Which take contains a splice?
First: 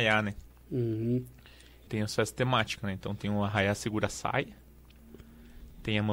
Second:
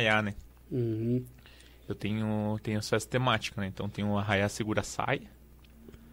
first; 1 cut; at 1.9 s

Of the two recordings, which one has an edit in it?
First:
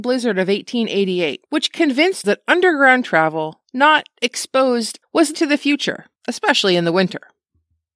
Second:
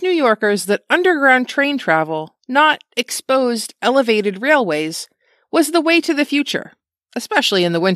first; 6 cuts; at 1.5 s, 2.2 s, 3.0 s, 5.0 s, 5.3 s, 6.2 s

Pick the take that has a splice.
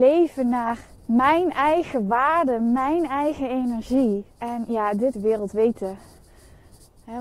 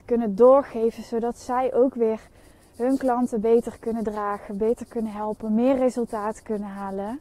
first; 3 cuts; at 1.0 s, 4.3 s, 5.1 s

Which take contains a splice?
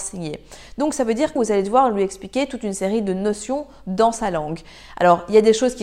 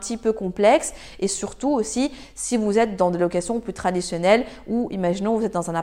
first; 1 cut; at 1.4 s

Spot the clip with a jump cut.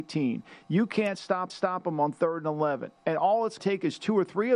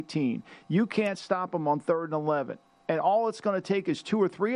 first; 3 cuts; at 1.5 s, 3.0 s, 3.6 s

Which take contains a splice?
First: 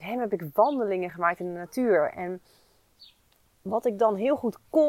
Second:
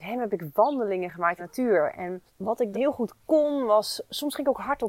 second; 3 cuts; at 1.4 s, 2.3 s, 2.7 s

